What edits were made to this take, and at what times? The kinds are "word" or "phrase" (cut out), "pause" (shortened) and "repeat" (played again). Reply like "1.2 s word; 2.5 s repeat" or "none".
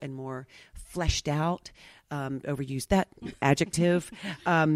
2.4 s word; 3.2 s phrase